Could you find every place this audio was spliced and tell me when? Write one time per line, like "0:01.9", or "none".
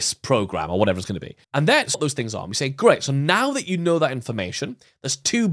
0:01.4
0:01.9